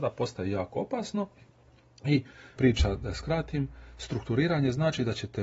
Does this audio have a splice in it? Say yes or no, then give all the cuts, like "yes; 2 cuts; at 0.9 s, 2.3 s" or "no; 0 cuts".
yes; 1 cut; at 2.6 s